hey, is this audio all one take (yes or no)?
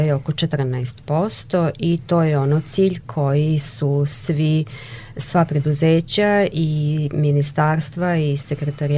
yes